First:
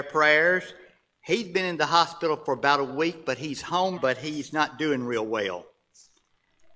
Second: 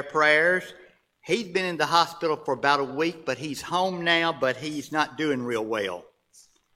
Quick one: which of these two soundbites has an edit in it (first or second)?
first